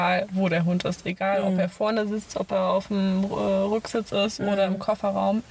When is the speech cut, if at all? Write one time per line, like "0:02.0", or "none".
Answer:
none